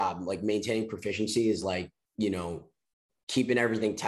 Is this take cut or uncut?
uncut